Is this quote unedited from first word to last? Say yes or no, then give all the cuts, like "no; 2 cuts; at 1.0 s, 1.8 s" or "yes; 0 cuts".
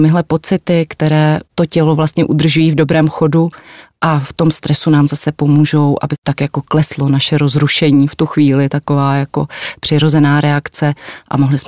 yes; 0 cuts